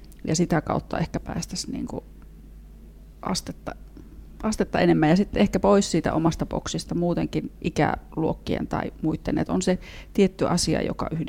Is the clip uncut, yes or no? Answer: yes